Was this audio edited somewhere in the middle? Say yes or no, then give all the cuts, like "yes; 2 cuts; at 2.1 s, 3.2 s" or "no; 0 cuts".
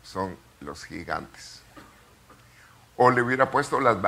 no; 0 cuts